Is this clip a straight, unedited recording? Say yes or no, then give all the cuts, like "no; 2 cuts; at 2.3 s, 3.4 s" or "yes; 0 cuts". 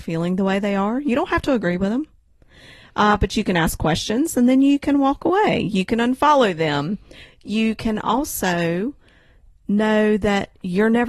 yes; 0 cuts